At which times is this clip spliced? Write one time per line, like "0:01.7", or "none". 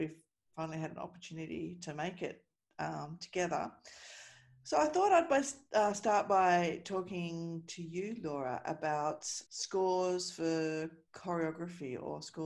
0:09.5